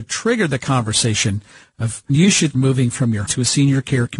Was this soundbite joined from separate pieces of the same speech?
yes; 3 cuts; at 2.1 s, 2.5 s, 3.3 s

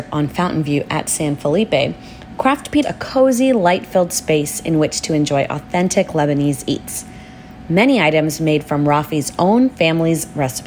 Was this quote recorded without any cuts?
no; 1 cut; at 2.8 s

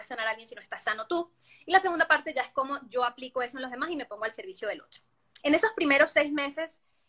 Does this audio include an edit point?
yes; 1 cut; at 5.4 s

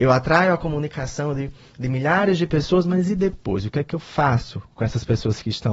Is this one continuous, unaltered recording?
yes; 0 cuts

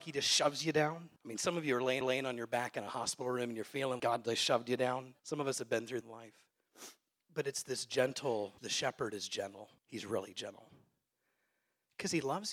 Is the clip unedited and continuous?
no; 8 cuts; at 1.2 s, 2.0 s, 4.0 s, 5.2 s, 6.0 s, 7.2 s, 8.6 s, 9.8 s

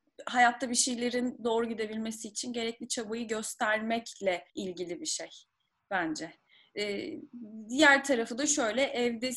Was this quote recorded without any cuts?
no; 1 cut; at 4.5 s

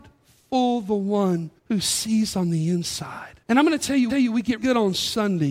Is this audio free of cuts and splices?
no; 4 cuts; at 1.6 s, 3.4 s, 4.1 s, 4.6 s

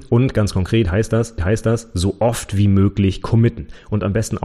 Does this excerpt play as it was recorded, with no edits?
no; 1 cut; at 1.4 s

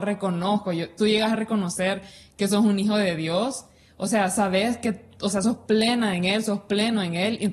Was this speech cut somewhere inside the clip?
no; 0 cuts

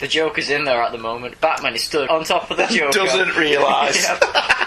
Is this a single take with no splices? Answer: no; 1 cut; at 2.1 s

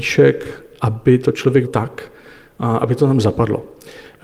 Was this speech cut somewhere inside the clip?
yes; 1 cut; at 1.6 s

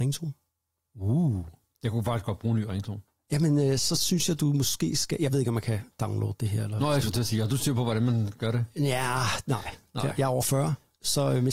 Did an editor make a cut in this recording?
no; 0 cuts

